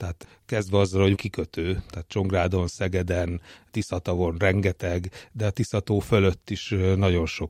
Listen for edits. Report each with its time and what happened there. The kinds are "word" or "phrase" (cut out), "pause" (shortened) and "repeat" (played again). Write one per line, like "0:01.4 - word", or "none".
0:01.1 - word